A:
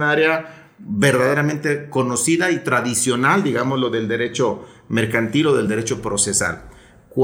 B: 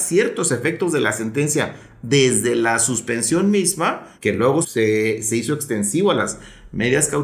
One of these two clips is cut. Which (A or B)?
B